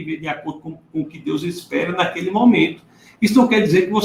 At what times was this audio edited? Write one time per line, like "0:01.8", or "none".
none